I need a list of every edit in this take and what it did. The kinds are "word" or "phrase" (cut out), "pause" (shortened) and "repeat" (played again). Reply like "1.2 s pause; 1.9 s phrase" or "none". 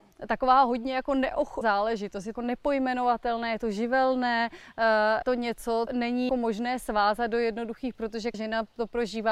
1.6 s word; 2.3 s word; 5.2 s word; 5.9 s word; 6.3 s word; 7.9 s word; 8.3 s word